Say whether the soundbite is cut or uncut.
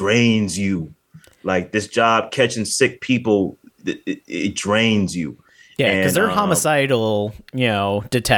uncut